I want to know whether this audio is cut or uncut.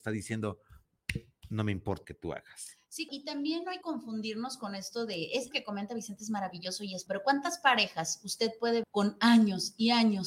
cut